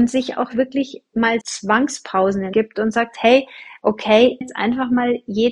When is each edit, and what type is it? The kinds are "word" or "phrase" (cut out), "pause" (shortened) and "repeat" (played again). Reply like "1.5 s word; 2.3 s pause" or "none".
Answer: 1.4 s word; 2.5 s word; 4.4 s phrase

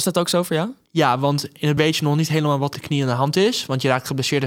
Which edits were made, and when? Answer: 1.8 s word; 2.7 s phrase

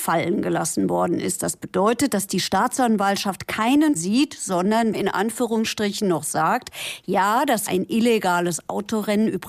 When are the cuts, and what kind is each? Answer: 4.0 s phrase; 4.9 s phrase; 7.7 s word

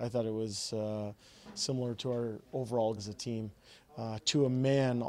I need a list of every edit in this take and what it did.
3.0 s word

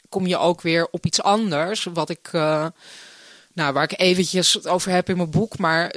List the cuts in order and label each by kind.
none

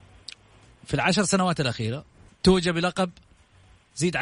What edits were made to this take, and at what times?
2.3 s pause

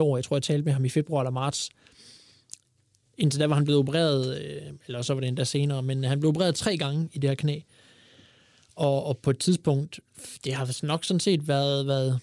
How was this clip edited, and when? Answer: none

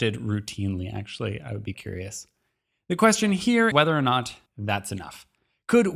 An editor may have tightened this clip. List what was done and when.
1.7 s word; 3.7 s word; 4.5 s pause

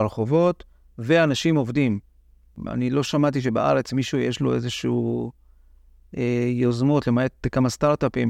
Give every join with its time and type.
none

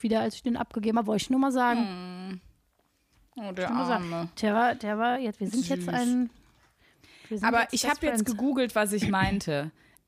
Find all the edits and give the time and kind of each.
none

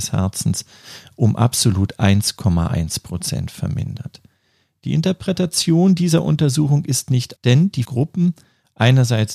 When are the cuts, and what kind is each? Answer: 7.4 s word; 7.8 s word

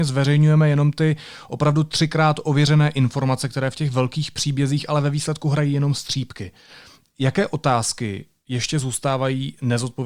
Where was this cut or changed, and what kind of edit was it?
none

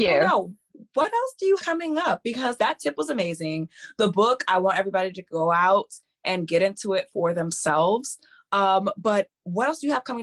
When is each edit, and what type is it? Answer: 1.6 s word; 2.6 s word

